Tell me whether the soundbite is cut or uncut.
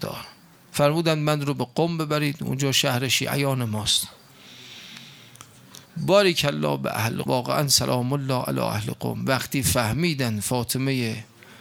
cut